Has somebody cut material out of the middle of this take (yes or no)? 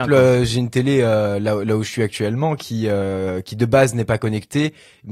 no